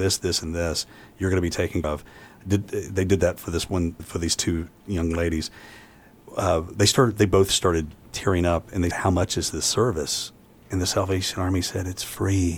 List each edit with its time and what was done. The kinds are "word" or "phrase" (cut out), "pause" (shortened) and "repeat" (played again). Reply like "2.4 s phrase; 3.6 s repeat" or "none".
1.8 s word; 4.0 s word; 8.9 s word